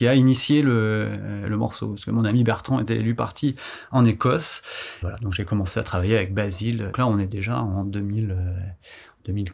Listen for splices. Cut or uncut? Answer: cut